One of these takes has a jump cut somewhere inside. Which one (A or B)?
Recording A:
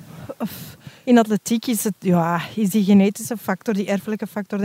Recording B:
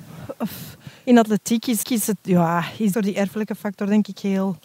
B